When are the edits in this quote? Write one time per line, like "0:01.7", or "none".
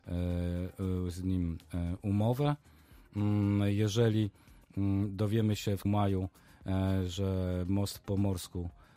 0:05.8